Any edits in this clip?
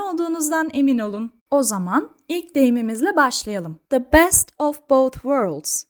yes; 2 cuts; at 1.4 s, 3.8 s

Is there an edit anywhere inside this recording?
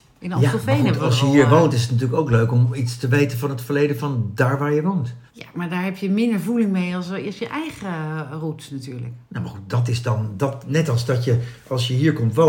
yes; 2 cuts; at 5.3 s, 9.3 s

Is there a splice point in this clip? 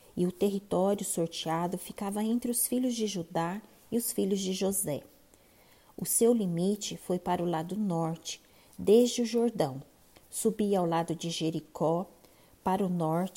no; 0 cuts

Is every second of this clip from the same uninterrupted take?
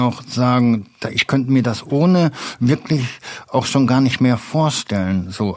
yes; 0 cuts

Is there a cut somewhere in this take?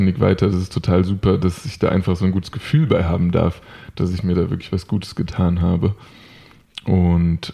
no; 0 cuts

